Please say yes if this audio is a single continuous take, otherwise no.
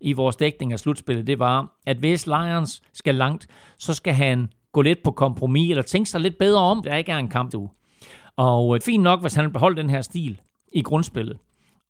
no